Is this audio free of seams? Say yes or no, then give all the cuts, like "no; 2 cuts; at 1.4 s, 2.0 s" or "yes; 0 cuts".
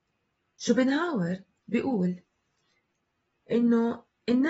no; 1 cut; at 1.6 s